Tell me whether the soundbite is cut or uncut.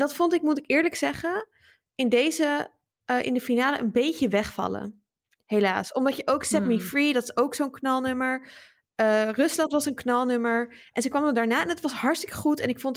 uncut